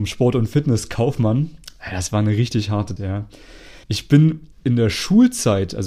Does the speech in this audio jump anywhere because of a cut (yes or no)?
yes